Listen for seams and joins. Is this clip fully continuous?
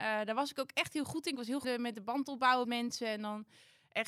no; 2 cuts; at 1.6 s, 2.6 s

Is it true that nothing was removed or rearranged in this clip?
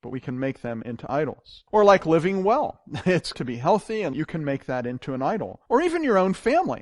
no; 4 cuts; at 1.7 s, 3.3 s, 4.1 s, 5.7 s

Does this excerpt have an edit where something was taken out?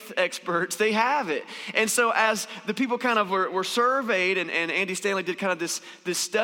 no; 0 cuts

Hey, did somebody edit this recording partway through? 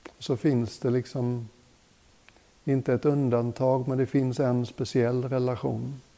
no; 0 cuts

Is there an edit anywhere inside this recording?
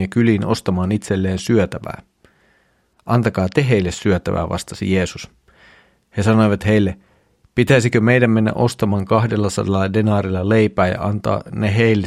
no; 0 cuts

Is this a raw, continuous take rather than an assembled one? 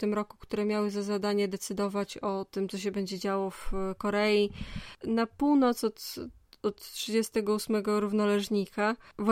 yes; 0 cuts

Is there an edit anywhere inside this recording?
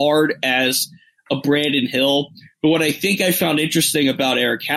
no; 0 cuts

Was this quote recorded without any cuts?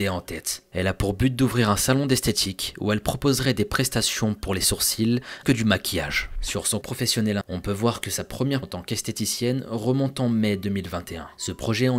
no; 4 cuts; at 5.4 s, 6.8 s, 7.4 s, 8.6 s

